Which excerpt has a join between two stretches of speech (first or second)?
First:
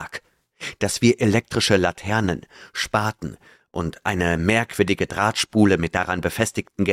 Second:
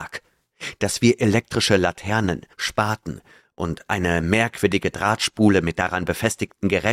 second